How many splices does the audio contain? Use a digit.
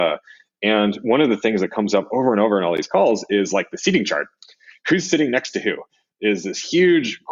0